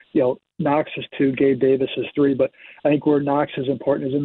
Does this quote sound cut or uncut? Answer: uncut